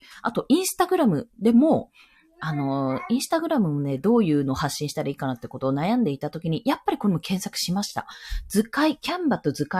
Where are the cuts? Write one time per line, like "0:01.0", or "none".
none